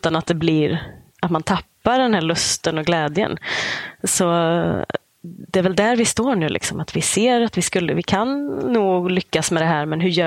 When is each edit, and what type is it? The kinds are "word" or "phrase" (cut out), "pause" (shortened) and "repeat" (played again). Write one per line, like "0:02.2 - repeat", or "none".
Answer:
none